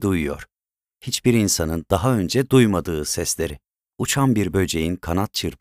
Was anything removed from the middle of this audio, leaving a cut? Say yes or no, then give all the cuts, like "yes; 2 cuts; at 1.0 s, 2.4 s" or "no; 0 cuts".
no; 0 cuts